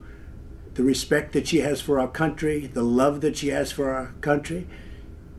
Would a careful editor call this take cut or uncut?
uncut